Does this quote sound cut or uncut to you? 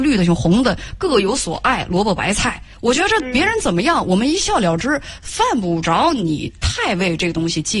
uncut